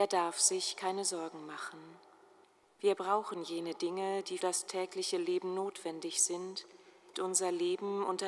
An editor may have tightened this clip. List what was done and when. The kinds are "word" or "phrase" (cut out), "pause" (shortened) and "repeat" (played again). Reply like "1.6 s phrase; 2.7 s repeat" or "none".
2.4 s pause; 4.4 s word; 7.1 s word